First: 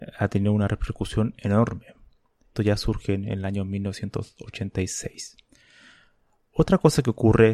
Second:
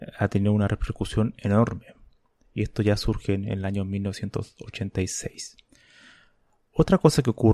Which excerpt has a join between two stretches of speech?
first; 1 cut; at 2.6 s

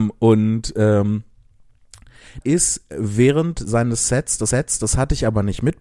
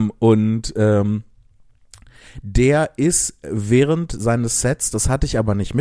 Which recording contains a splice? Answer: first; 2 cuts; at 2.4 s, 4.5 s

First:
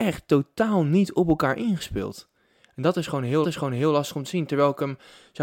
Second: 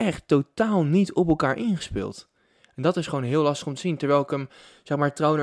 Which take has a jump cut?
first; 1 cut; at 3.4 s

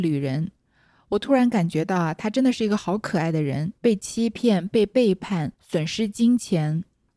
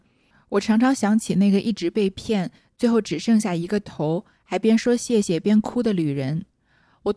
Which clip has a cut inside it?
first; 2 cuts; at 3.8 s, 5.5 s

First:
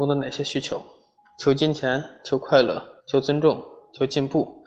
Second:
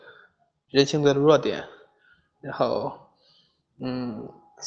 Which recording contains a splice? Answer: first; 2 cuts; at 1.2 s, 3.0 s

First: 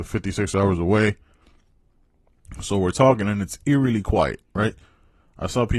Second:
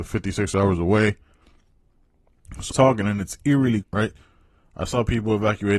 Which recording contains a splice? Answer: second; 2 cuts; at 2.7 s, 3.8 s

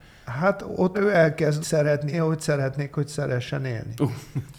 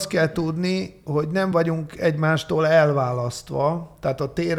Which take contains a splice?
first; 3 cuts; at 0.9 s, 1.6 s, 2.1 s

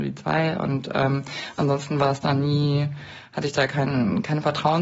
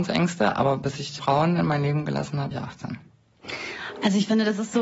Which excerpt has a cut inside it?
second; 2 cuts; at 1.2 s, 2.5 s

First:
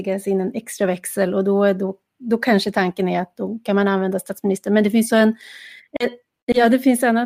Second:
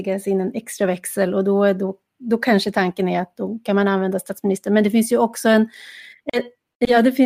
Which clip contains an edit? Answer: first; 1 cut; at 5.1 s

